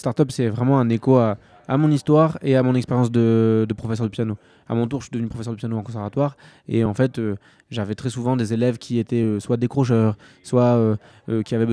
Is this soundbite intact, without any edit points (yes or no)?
yes